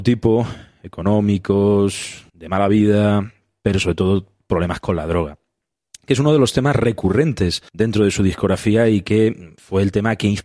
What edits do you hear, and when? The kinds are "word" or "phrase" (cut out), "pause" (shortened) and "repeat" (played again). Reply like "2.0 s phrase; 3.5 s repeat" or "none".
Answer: 2.3 s pause; 7.7 s pause